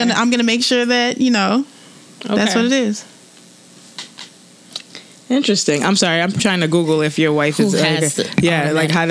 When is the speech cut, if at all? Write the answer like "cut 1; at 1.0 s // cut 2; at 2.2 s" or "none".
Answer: cut 1; at 6.4 s